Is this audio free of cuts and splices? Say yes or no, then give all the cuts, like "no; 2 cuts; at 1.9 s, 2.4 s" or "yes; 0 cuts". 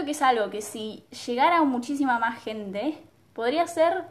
yes; 0 cuts